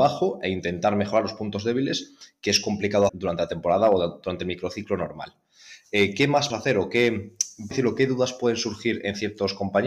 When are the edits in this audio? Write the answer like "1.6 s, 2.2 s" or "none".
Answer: 3.1 s, 6.5 s, 7.7 s